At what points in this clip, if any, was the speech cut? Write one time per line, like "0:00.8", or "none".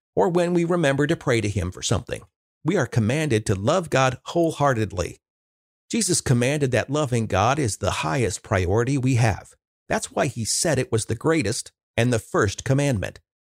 none